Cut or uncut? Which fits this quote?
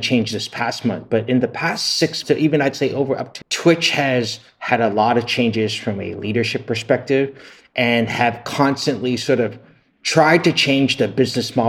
cut